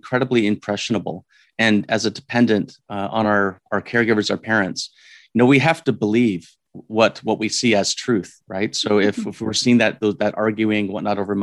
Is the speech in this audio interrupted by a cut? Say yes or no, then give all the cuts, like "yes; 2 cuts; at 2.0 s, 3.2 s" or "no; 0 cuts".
no; 0 cuts